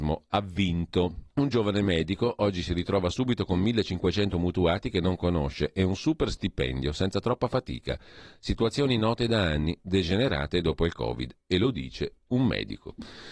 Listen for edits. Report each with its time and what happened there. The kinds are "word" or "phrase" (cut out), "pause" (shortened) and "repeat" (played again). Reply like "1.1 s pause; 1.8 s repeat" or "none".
1.3 s pause